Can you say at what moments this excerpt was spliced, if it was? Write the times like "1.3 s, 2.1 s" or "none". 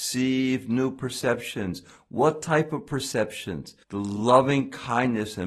none